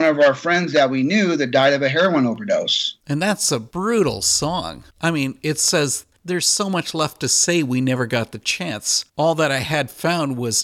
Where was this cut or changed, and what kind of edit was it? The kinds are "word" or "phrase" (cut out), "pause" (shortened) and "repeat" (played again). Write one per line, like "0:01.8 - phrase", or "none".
0:03.0 - pause
0:04.9 - pause
0:06.2 - pause
0:09.1 - pause